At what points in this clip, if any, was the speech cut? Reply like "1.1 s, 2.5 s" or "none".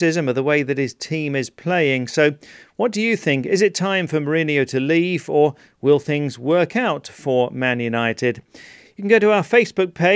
none

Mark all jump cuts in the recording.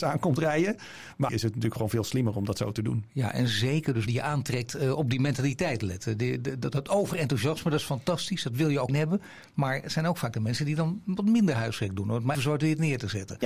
1.3 s, 4.1 s, 8.9 s, 12.3 s

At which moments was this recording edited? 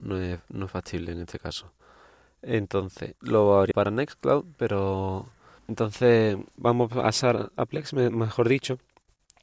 3.1 s, 3.7 s, 5.6 s, 6.6 s

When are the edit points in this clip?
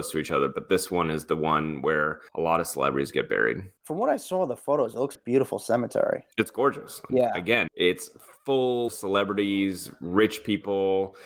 2.3 s, 3.8 s, 5.1 s, 6.3 s, 7.1 s, 7.7 s, 8.9 s

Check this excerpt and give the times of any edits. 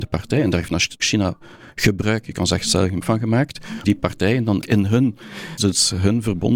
1.0 s, 3.0 s, 3.8 s, 4.6 s, 5.6 s

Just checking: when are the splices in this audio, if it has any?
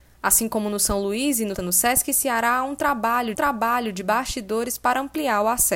1.5 s, 3.3 s

